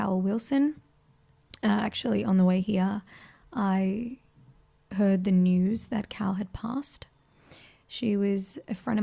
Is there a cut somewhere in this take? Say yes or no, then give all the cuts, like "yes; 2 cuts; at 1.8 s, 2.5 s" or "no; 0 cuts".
no; 0 cuts